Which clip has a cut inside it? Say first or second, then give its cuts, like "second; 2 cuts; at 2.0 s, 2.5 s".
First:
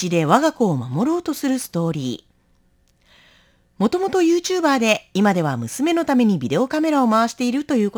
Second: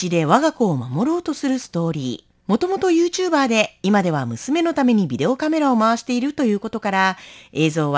second; 1 cut; at 2.4 s